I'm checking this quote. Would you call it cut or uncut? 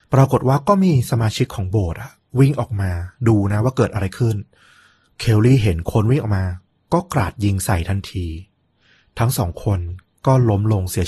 uncut